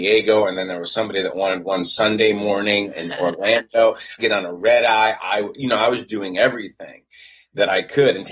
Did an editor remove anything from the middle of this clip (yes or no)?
yes